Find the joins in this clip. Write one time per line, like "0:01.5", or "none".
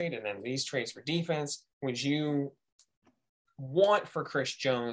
0:01.7